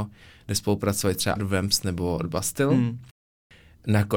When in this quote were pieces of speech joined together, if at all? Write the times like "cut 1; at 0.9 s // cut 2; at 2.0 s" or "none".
cut 1; at 1.4 s

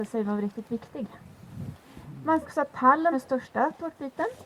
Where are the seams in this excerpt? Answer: cut 1; at 2.4 s // cut 2; at 3.1 s

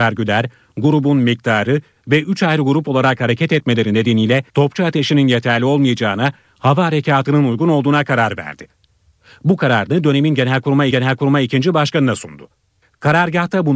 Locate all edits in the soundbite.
cut 1; at 4.5 s // cut 2; at 10.9 s

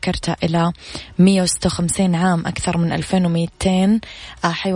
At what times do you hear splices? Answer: none

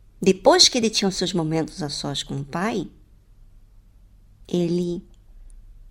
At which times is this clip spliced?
none

